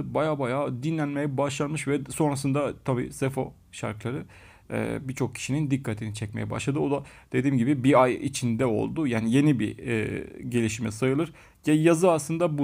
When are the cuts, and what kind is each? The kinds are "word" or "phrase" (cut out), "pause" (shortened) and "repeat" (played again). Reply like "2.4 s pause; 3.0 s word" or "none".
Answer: none